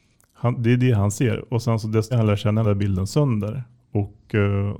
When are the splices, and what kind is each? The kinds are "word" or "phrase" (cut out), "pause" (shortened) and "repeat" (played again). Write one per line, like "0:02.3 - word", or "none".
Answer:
0:02.1 - word
0:02.6 - phrase